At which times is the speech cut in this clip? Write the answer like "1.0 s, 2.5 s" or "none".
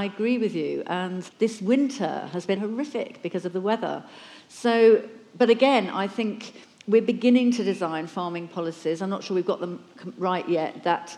1.3 s, 2.6 s